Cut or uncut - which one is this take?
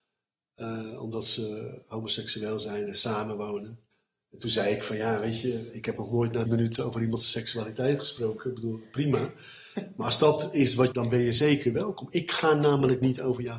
cut